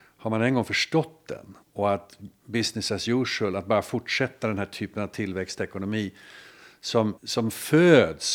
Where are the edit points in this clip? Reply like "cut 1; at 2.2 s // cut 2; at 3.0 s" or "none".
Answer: cut 1; at 1.6 s // cut 2; at 7.2 s